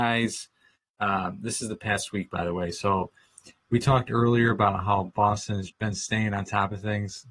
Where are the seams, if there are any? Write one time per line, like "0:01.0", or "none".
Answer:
0:05.7